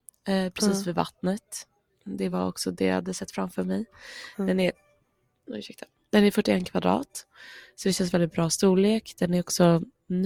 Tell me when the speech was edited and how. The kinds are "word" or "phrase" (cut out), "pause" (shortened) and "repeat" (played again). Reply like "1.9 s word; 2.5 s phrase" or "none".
none